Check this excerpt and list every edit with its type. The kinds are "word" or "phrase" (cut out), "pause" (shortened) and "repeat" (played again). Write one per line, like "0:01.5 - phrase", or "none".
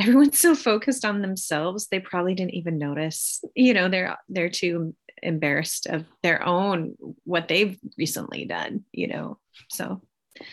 none

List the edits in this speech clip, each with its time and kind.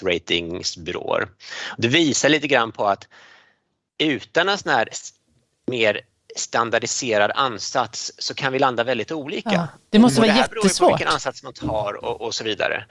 none

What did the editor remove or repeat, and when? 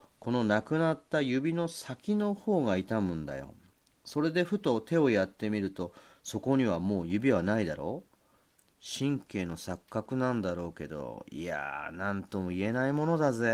none

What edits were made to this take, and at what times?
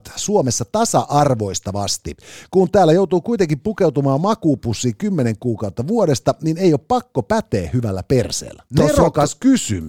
0:08.7 - pause

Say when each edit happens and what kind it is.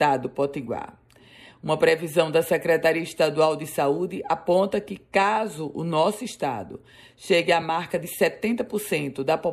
none

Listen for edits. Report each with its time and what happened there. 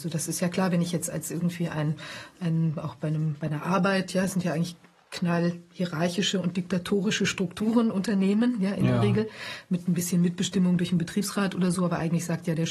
none

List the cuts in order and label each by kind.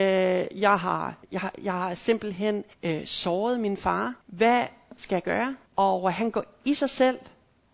0:01.2 - pause
0:02.7 - pause
0:04.2 - pause
0:05.7 - pause

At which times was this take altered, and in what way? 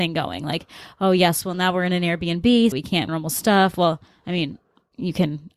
0:02.7 - word
0:03.1 - phrase

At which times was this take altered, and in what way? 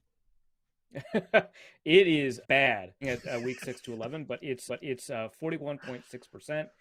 0:02.4 - word
0:03.0 - phrase
0:04.7 - repeat

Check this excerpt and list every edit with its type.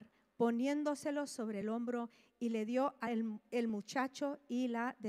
none

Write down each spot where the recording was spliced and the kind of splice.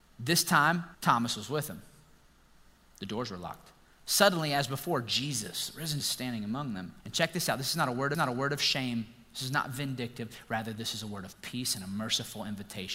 0:00.9 - pause
0:06.0 - word
0:07.0 - pause
0:08.1 - repeat

